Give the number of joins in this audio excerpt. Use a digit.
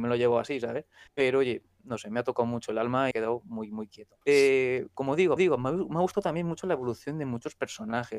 4